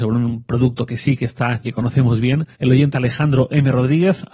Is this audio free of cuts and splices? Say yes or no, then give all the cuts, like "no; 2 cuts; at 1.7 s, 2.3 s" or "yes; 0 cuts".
no; 3 cuts; at 1.6 s, 2.5 s, 2.9 s